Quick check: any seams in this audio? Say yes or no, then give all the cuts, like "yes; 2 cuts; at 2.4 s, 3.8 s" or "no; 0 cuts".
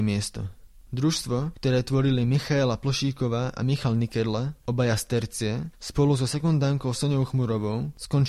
no; 0 cuts